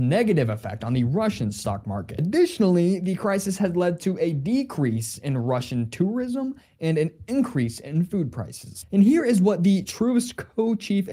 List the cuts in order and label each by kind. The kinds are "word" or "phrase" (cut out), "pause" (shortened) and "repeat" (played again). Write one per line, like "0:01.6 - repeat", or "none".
none